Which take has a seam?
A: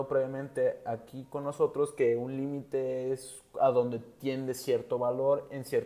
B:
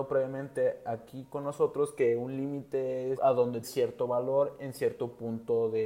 B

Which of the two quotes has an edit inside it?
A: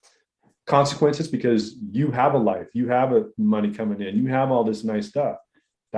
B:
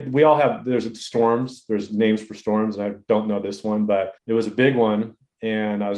B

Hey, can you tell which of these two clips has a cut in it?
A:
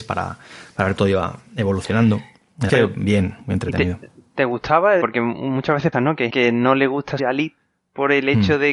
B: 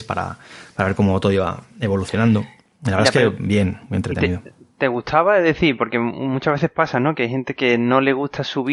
A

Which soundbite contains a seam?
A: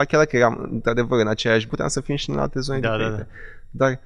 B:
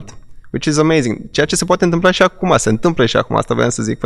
A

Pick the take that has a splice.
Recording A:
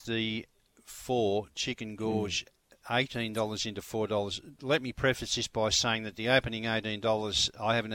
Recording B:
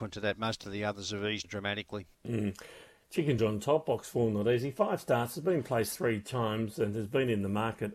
B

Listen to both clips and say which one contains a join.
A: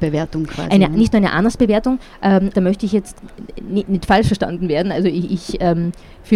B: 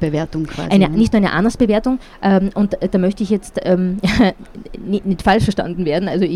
A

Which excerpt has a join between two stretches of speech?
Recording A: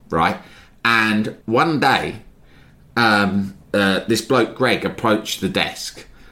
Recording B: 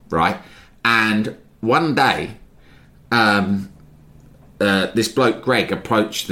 A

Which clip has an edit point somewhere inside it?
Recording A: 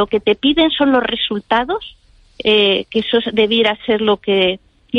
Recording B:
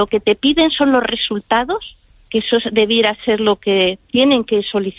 B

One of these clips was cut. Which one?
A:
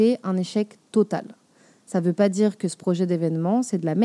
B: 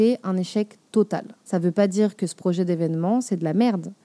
B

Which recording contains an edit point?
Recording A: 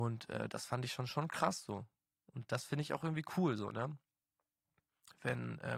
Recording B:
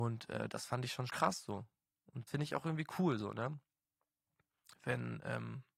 B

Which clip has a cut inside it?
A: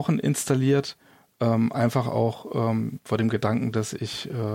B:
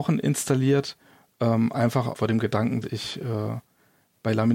B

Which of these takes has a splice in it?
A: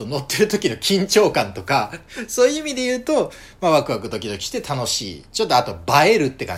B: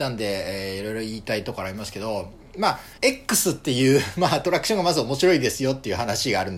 B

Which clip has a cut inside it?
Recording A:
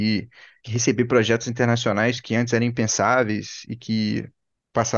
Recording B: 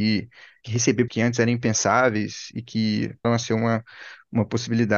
B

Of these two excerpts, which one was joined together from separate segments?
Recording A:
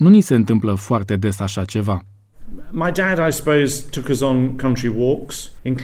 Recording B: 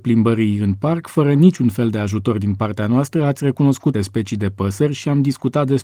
B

